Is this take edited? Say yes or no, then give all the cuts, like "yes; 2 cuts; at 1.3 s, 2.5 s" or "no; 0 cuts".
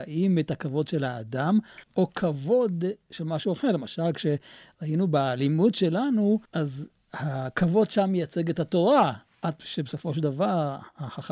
yes; 2 cuts; at 1.8 s, 6.4 s